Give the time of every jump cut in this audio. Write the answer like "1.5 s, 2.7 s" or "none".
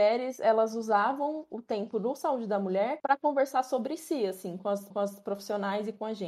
4.9 s